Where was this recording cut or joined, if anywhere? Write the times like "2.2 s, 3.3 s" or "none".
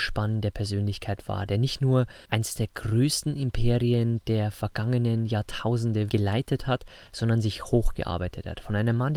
2.2 s, 6.1 s

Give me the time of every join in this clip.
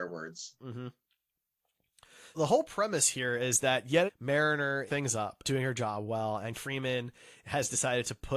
2.3 s, 4.1 s, 4.9 s, 5.4 s, 6.5 s

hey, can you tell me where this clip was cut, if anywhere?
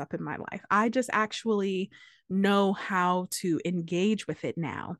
none

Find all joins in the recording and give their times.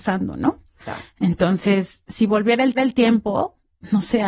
2.7 s

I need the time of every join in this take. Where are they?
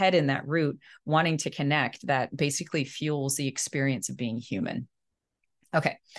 none

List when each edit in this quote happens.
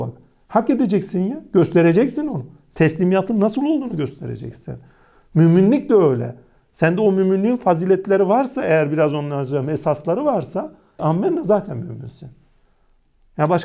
11.0 s

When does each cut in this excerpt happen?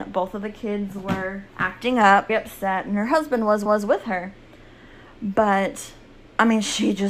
1.5 s, 2.3 s, 3.7 s

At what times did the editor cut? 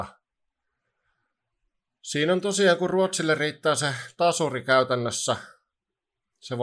none

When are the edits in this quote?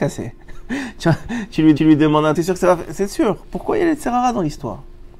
1.8 s, 2.3 s

